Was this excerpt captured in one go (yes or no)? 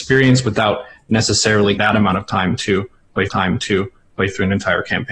no